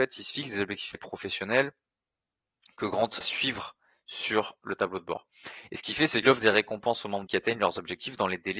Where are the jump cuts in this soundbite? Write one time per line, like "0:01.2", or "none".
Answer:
0:00.9
0:03.2
0:06.2
0:07.3